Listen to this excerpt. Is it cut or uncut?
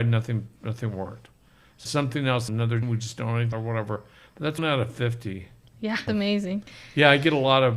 cut